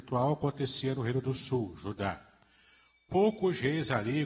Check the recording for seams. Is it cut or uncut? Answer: uncut